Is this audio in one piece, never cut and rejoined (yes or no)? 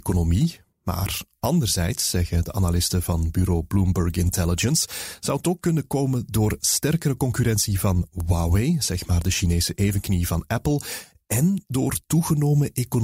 yes